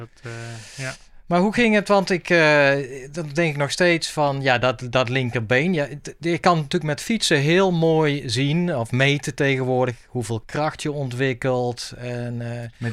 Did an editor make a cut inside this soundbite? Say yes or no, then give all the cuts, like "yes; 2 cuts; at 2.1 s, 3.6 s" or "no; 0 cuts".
no; 0 cuts